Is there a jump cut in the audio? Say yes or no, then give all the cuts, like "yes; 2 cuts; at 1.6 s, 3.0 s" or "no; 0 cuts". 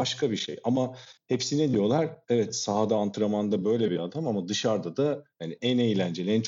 no; 0 cuts